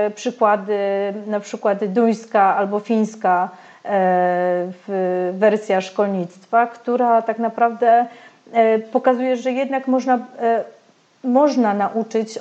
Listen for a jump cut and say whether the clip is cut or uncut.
uncut